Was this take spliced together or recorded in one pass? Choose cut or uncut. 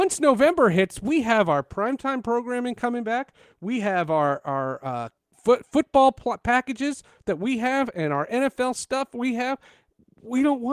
uncut